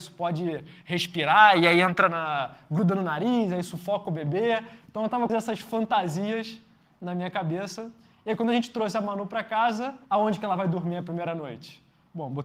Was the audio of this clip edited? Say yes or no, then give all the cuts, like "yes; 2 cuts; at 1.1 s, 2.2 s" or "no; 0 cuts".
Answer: yes; 2 cuts; at 5.3 s, 10.0 s